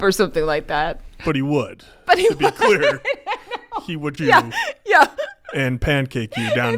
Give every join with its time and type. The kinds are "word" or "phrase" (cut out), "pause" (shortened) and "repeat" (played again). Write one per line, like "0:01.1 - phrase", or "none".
0:04.2 - word

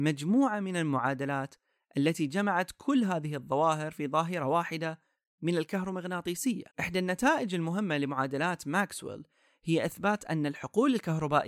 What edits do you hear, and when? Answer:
0:06.7 - pause

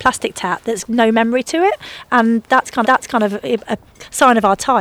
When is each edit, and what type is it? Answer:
0:02.8 - repeat

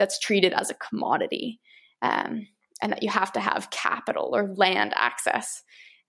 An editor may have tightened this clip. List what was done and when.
none

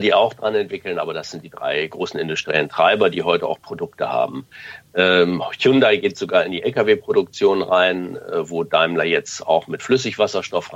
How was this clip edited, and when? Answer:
none

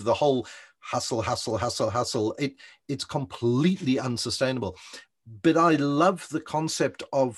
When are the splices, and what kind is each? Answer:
0:02.8 - word

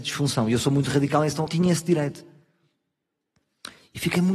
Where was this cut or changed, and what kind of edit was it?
0:01.5 - phrase

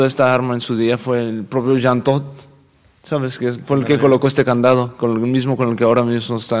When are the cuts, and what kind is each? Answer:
none

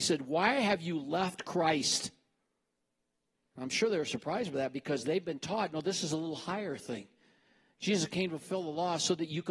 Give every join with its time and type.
none

